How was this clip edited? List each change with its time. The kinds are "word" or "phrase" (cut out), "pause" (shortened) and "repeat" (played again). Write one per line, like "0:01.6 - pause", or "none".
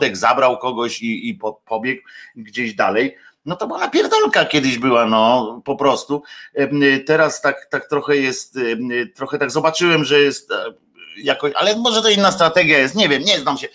none